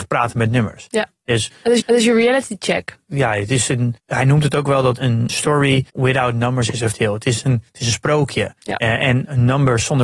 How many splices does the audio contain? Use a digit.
8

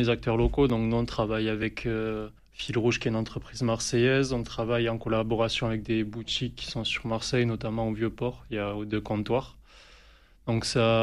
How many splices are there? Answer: 1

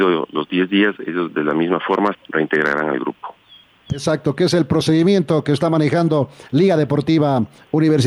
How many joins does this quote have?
2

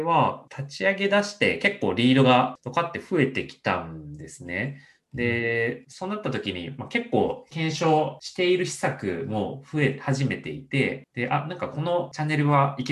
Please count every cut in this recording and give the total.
0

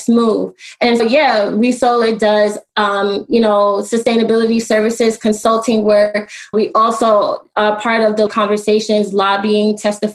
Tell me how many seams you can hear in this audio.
3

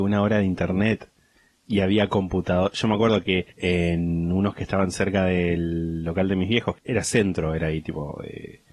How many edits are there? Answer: 2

